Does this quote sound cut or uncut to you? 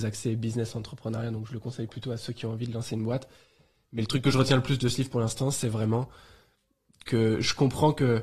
uncut